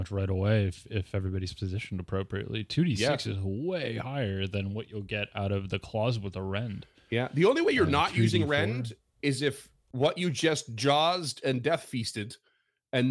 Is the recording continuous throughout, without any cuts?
yes; 0 cuts

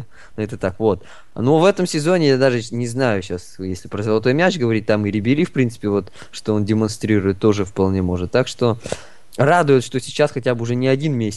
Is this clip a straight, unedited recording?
no; 1 cut; at 9.3 s

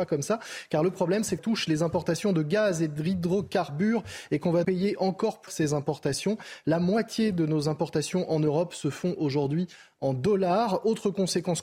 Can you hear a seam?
yes; 3 cuts; at 1.4 s, 4.6 s, 5.5 s

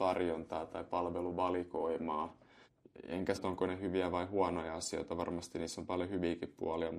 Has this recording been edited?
yes; 1 cut; at 3.3 s

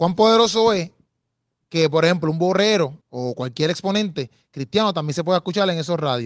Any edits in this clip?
yes; 1 cut; at 3.0 s

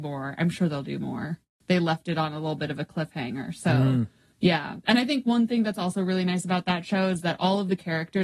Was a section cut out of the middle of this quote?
no; 0 cuts

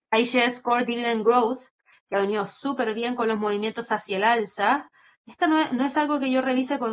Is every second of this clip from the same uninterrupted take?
yes; 0 cuts

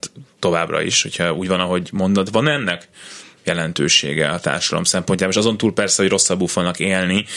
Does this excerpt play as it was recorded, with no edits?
yes; 0 cuts

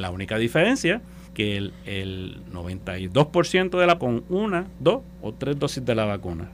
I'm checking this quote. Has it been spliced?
yes; 3 cuts; at 1.3 s, 4.0 s, 4.8 s

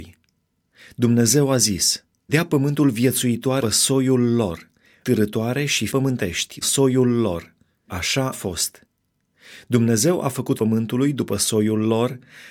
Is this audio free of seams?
no; 8 cuts; at 2.3 s, 3.6 s, 5.0 s, 5.9 s, 6.6 s, 7.9 s, 8.3 s, 10.5 s

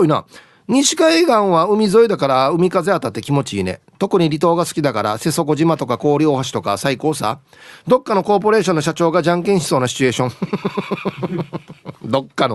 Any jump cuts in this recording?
no; 0 cuts

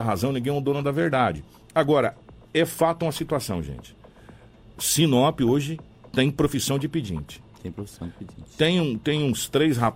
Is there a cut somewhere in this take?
no; 0 cuts

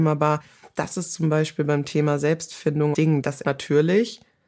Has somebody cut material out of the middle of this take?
yes; 2 cuts; at 2.9 s, 3.4 s

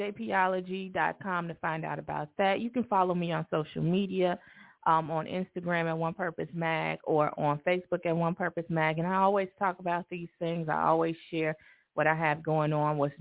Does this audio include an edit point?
no; 0 cuts

